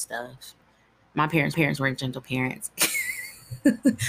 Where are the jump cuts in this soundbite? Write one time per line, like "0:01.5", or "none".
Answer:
0:01.5